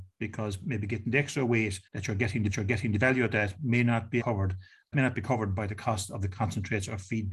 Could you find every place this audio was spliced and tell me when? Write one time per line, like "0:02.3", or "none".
0:01.9
0:02.5
0:04.2
0:04.9